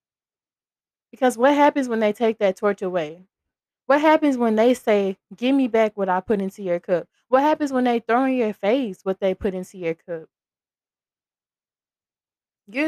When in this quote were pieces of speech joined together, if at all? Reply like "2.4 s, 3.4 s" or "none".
none